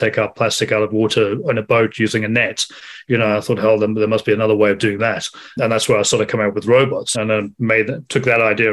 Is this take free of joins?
no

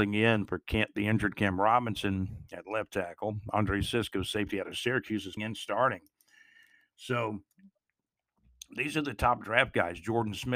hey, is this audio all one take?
no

